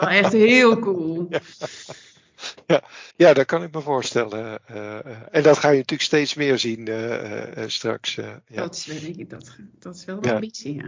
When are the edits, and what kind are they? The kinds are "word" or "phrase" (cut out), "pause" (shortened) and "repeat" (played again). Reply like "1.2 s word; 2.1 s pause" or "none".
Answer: 3.1 s pause